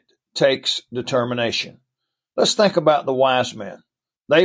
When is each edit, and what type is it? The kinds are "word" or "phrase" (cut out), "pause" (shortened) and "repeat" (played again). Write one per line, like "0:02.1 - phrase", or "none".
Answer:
none